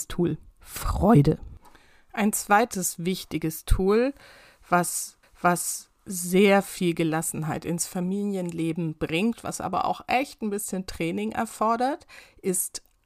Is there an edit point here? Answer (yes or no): yes